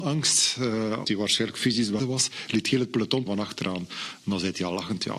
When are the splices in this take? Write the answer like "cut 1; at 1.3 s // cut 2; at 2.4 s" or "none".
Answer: cut 1; at 1.0 s // cut 2; at 2.0 s // cut 3; at 3.3 s

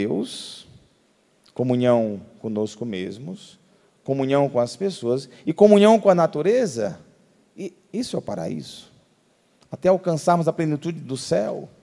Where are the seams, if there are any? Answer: none

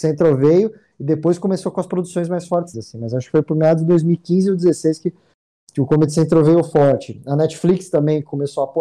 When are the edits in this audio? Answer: cut 1; at 2.7 s

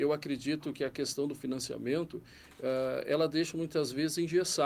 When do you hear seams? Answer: none

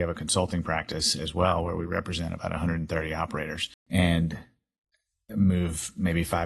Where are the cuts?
cut 1; at 3.8 s

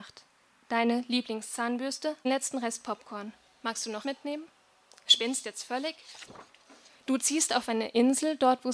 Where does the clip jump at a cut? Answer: cut 1; at 2.2 s // cut 2; at 4.0 s

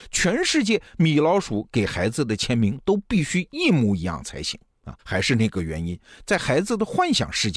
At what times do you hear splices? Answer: cut 1; at 5.0 s

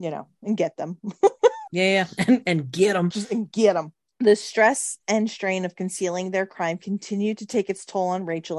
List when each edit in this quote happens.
cut 1; at 1.7 s // cut 2; at 3.1 s // cut 3; at 4.0 s

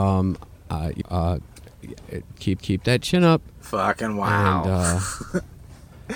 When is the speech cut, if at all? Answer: cut 1; at 1.0 s // cut 2; at 2.6 s

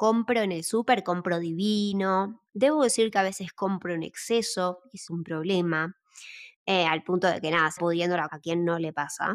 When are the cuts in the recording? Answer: cut 1; at 2.5 s // cut 2; at 5.1 s // cut 3; at 7.8 s // cut 4; at 8.3 s

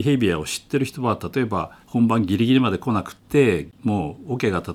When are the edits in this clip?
cut 1; at 1.8 s // cut 2; at 3.2 s

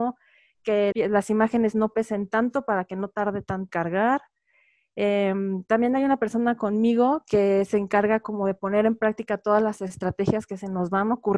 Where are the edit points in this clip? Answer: cut 1; at 0.9 s // cut 2; at 3.7 s

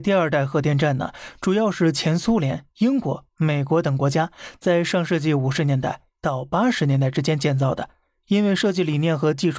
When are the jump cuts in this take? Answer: none

